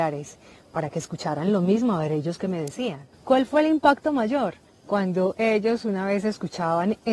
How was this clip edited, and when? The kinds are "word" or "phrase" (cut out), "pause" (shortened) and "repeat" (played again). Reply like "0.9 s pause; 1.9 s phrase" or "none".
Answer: 3.1 s pause; 4.7 s pause